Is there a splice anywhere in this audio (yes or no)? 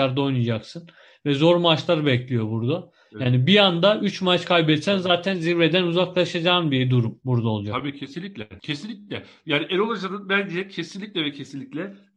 no